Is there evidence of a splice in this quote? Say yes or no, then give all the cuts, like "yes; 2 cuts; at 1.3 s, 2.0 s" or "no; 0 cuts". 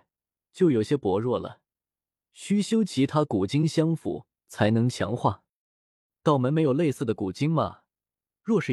no; 0 cuts